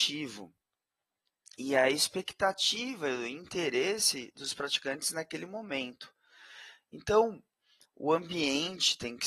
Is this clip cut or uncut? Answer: uncut